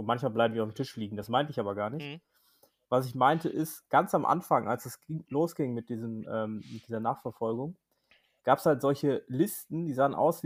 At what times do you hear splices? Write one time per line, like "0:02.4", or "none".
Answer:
none